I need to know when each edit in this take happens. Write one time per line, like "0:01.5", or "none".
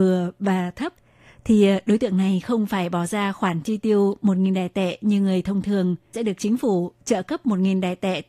0:06.1